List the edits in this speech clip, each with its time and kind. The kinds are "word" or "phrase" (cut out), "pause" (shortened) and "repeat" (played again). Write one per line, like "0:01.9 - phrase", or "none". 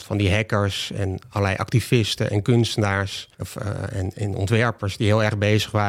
0:03.3 - pause